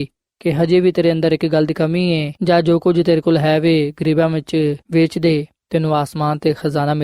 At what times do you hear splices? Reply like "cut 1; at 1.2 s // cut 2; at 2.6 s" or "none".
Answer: cut 1; at 2.4 s // cut 2; at 4.8 s